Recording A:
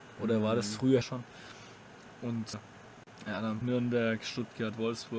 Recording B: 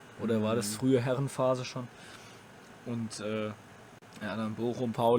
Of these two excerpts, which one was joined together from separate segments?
A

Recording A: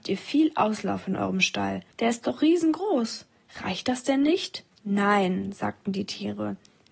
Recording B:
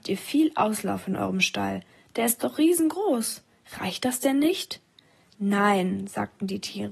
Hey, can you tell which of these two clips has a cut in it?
A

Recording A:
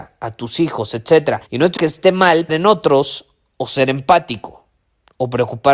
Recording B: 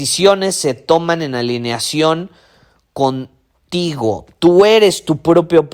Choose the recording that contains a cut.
A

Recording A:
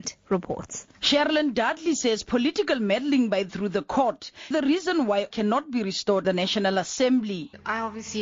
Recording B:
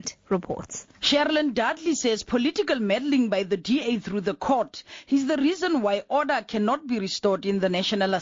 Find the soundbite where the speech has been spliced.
A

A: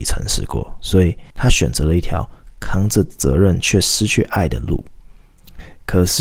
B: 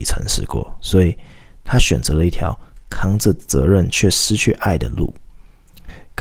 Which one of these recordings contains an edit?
A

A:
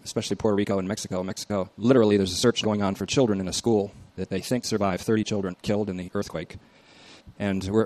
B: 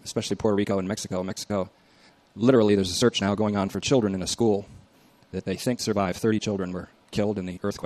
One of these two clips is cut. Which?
A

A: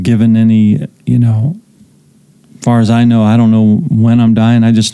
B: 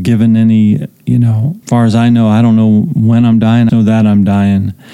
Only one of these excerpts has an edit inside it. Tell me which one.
B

